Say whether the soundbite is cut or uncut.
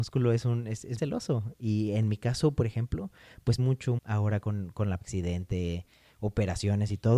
cut